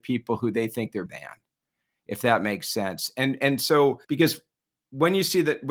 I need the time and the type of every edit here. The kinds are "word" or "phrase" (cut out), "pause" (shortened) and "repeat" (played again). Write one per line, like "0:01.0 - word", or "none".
0:01.1 - word
0:04.0 - pause